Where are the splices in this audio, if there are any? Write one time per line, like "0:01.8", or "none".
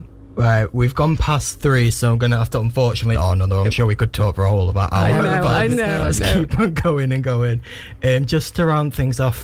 0:03.1